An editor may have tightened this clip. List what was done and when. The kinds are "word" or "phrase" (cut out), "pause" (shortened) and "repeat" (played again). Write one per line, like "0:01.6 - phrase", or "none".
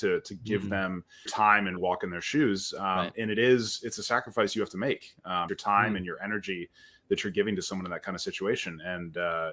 0:01.3 - word
0:01.8 - word
0:05.5 - word